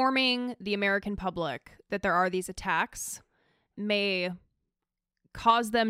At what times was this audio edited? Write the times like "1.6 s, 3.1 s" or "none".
3.7 s